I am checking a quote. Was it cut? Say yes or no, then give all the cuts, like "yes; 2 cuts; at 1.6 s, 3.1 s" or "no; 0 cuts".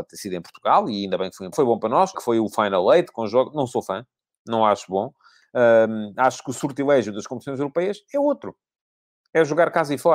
yes; 2 cuts; at 1.5 s, 2.1 s